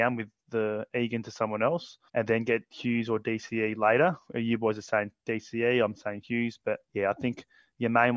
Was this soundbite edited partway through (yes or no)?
yes